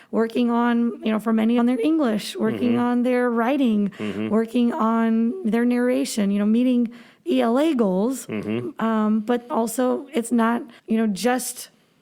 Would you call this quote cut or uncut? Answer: cut